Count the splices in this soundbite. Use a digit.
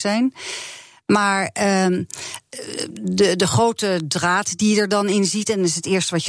0